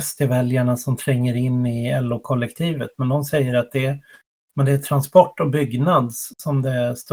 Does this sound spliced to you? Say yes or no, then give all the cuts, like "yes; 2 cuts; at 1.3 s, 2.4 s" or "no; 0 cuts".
no; 0 cuts